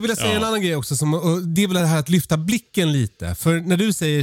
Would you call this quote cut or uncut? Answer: uncut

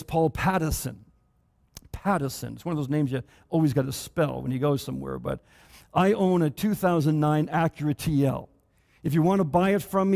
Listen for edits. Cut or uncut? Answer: uncut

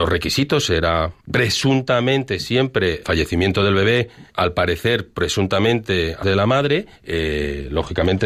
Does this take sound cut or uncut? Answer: cut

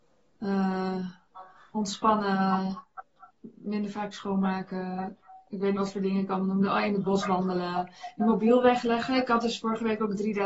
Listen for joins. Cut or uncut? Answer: cut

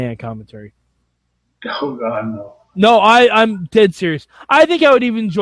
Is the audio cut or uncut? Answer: cut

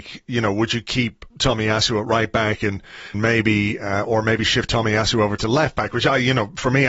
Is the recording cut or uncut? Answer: cut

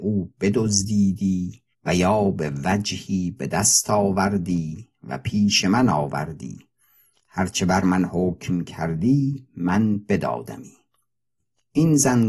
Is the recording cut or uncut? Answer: cut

